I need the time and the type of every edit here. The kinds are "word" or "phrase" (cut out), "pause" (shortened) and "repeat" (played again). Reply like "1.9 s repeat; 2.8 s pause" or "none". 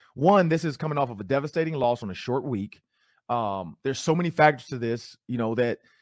none